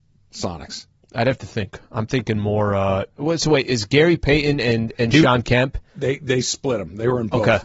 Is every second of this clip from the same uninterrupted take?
yes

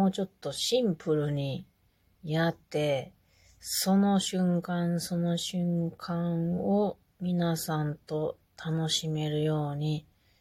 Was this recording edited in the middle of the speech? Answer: yes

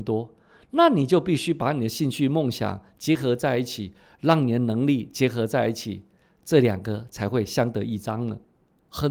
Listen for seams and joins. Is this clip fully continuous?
yes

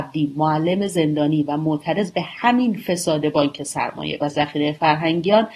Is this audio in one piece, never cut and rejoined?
no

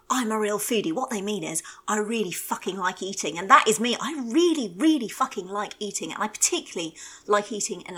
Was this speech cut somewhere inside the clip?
no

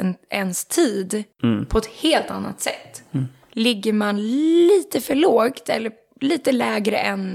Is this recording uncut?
yes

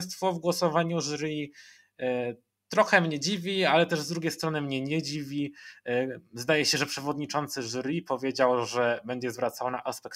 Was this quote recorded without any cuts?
yes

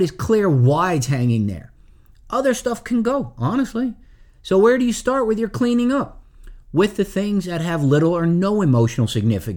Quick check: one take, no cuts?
yes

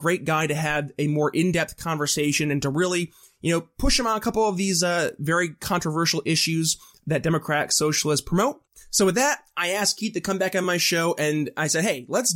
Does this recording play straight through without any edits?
yes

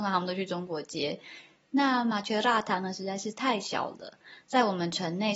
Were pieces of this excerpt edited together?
no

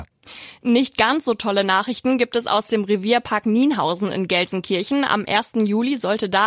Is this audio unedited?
yes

